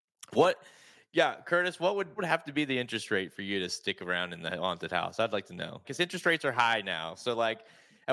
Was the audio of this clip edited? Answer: yes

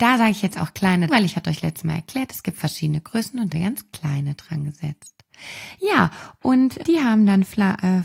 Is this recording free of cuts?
no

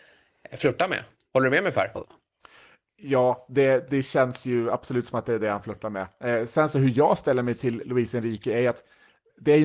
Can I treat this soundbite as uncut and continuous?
yes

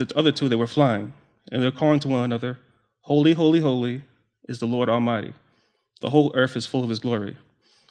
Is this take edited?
no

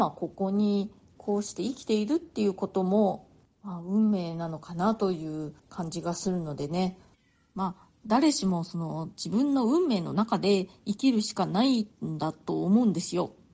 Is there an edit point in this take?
yes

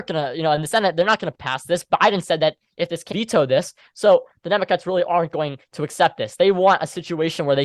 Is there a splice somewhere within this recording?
yes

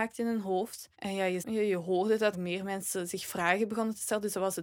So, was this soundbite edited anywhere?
yes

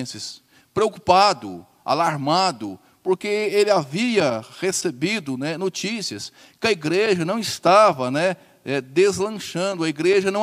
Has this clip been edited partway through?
no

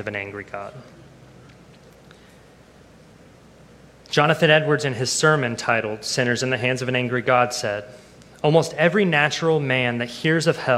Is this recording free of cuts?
yes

